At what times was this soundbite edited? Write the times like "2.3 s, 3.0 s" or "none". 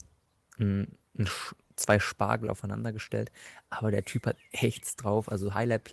1.1 s